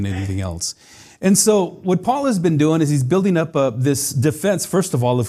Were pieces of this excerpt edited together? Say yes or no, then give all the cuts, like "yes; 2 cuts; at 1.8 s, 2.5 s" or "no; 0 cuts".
no; 0 cuts